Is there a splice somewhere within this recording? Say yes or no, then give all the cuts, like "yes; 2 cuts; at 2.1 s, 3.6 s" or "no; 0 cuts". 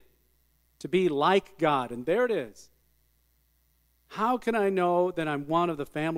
no; 0 cuts